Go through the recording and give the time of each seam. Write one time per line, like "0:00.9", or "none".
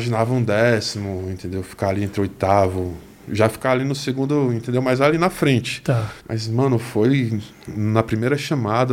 0:06.2